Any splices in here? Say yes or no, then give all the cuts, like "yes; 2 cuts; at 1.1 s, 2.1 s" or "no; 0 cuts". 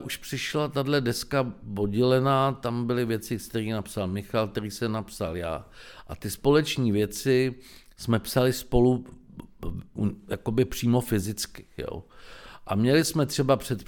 no; 0 cuts